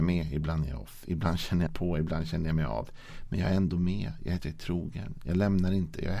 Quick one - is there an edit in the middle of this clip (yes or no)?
yes